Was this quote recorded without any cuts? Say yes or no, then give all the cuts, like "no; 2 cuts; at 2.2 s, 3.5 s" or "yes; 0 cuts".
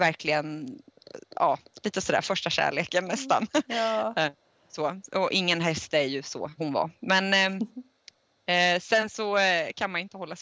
no; 1 cut; at 6.6 s